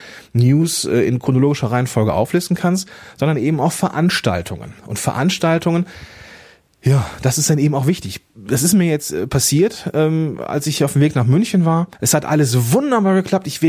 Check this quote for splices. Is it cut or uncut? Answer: cut